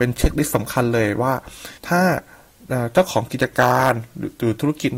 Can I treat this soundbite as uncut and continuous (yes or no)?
no